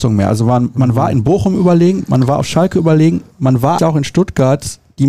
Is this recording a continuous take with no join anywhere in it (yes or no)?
no